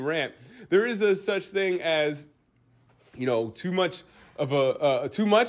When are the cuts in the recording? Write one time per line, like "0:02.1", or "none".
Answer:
none